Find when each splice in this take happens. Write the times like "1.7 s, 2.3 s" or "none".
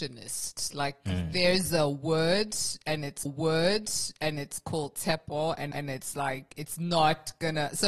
3.2 s, 5.7 s